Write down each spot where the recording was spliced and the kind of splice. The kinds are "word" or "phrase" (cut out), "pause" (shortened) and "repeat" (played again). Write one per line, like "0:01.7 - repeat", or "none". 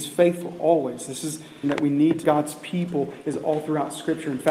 0:01.6 - phrase
0:02.2 - phrase

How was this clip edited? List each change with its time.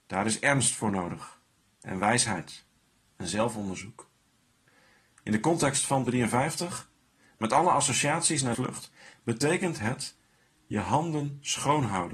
0:06.1 - word
0:08.5 - word

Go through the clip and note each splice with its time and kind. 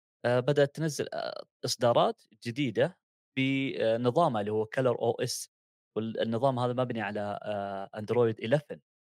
none

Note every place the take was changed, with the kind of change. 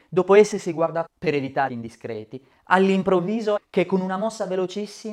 0:01.1 - word
0:01.7 - word
0:03.6 - word

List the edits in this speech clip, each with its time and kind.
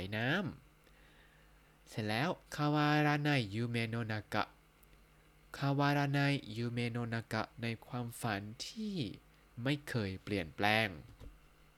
0:02.4 - pause
0:07.5 - pause

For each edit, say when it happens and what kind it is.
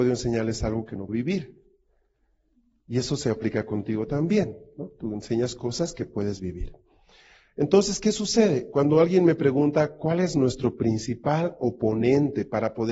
0:01.1 - word

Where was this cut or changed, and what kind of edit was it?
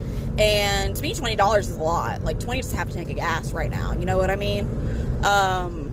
0:02.6 - word

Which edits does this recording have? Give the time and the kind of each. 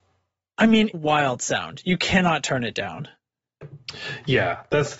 0:00.9 - phrase

